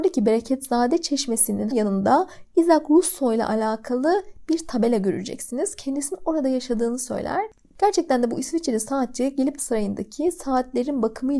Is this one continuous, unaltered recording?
no; 2 cuts; at 1.7 s, 9.6 s

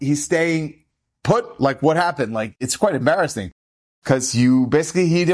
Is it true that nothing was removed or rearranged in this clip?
yes; 0 cuts

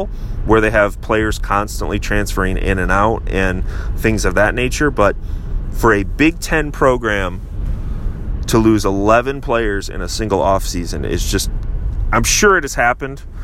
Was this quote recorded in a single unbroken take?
yes; 0 cuts

